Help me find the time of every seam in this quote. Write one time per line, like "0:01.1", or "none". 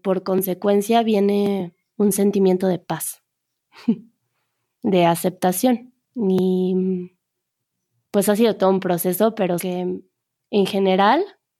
0:06.0
0:09.6